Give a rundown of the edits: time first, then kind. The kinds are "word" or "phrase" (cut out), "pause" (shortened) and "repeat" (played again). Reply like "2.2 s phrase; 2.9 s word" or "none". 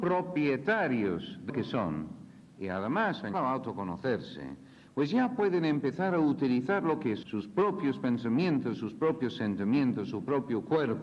1.5 s word; 3.3 s word; 7.2 s word